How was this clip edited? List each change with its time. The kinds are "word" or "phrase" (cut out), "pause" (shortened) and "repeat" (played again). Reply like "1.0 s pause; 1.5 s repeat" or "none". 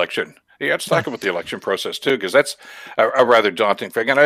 none